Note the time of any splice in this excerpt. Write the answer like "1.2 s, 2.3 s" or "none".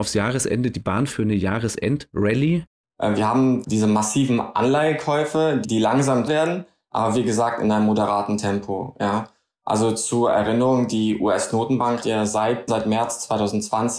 1.1 s, 3.6 s, 5.6 s, 6.3 s, 12.0 s, 12.7 s